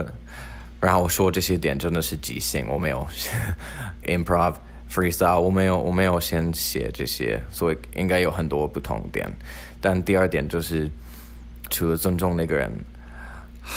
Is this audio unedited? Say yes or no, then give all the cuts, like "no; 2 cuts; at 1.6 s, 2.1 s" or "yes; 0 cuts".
no; 2 cuts; at 4.0 s, 11.7 s